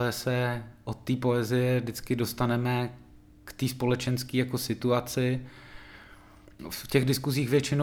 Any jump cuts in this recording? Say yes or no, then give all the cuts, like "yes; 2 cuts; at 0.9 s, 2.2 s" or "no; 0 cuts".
no; 0 cuts